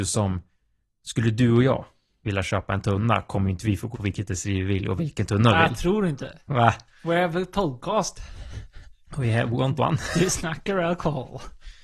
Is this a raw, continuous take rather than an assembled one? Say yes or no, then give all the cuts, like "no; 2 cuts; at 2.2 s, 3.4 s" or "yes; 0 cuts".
no; 3 cuts; at 3.9 s, 5.0 s, 9.8 s